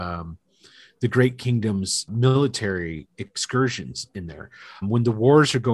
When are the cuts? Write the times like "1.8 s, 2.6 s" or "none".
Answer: 2.1 s, 4.8 s